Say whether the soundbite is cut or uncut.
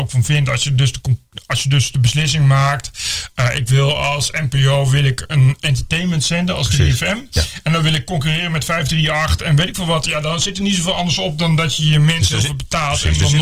uncut